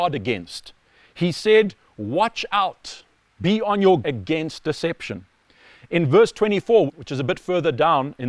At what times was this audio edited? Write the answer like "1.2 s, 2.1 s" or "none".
4.0 s, 6.9 s